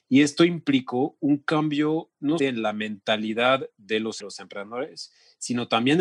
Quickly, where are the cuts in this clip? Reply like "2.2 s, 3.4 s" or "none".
2.4 s, 4.2 s